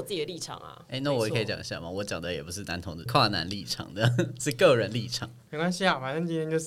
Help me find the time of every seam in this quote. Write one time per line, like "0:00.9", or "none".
0:03.1
0:05.5